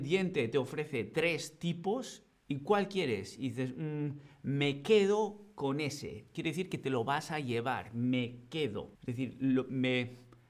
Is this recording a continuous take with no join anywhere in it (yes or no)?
no